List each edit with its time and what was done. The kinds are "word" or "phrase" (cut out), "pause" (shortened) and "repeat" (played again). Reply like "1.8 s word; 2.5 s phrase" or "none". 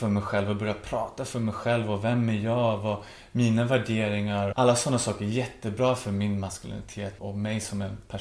4.5 s word; 7.2 s word

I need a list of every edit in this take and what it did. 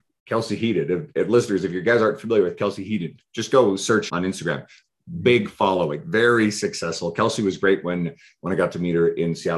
4.1 s word

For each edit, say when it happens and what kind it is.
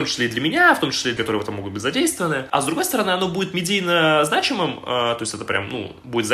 1.2 s word

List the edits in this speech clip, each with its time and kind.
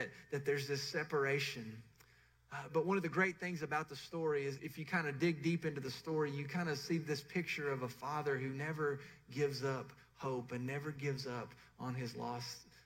2.7 s word; 4.6 s word

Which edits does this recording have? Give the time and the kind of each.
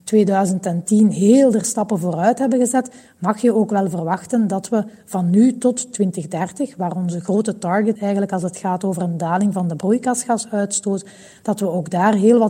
8.0 s word

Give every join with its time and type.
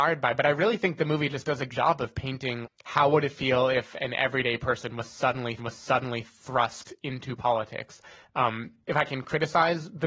1.7 s word; 2.6 s word; 5.6 s repeat; 8.8 s pause

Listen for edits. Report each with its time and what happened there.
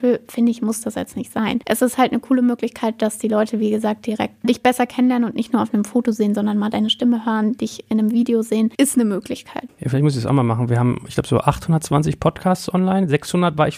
none

